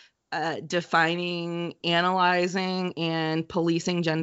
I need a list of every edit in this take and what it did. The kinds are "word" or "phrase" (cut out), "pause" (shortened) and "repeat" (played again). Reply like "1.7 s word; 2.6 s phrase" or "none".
1.8 s word